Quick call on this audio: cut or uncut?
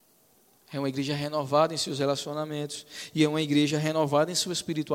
uncut